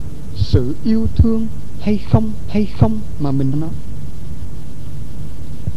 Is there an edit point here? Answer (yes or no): yes